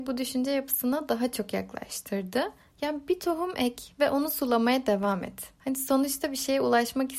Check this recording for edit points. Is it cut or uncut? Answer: cut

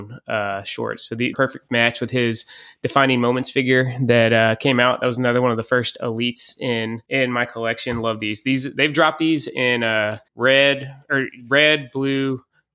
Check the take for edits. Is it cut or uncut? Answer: cut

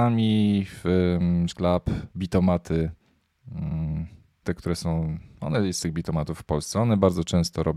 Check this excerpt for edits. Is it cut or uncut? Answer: cut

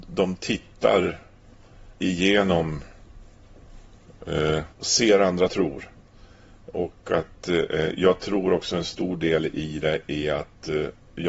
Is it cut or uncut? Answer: cut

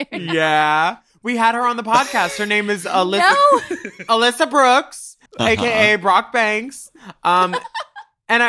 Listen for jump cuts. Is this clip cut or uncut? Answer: cut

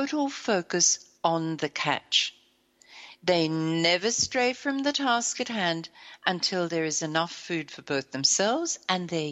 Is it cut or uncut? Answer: cut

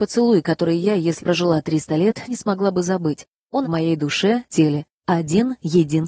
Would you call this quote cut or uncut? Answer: cut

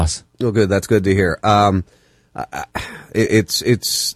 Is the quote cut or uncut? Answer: uncut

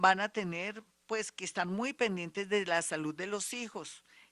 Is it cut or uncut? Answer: uncut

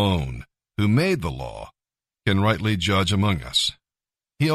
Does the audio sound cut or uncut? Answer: uncut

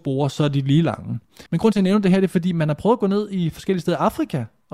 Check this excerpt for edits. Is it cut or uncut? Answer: cut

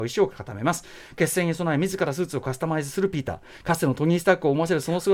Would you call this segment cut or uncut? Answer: uncut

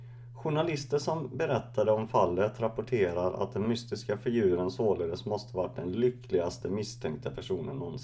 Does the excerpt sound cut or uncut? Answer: uncut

